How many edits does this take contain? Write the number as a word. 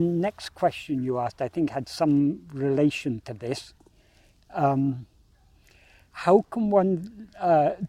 zero